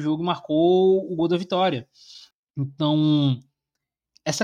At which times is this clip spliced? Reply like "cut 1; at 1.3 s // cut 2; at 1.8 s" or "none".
cut 1; at 2.3 s